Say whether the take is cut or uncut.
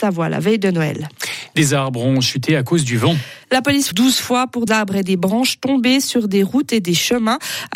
cut